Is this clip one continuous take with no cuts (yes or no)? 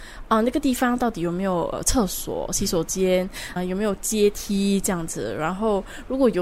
no